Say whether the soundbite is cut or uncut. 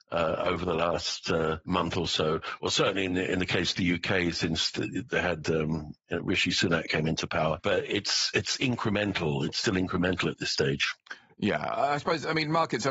uncut